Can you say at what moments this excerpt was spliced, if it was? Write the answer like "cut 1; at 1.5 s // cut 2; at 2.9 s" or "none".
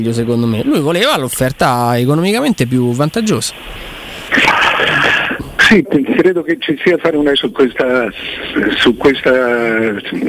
cut 1; at 5.8 s // cut 2; at 7.0 s // cut 3; at 7.3 s